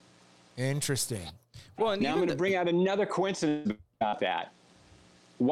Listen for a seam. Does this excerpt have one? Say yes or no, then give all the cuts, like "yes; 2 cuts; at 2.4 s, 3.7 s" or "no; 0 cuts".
no; 0 cuts